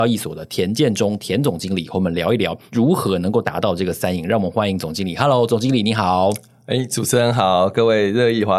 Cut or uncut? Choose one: uncut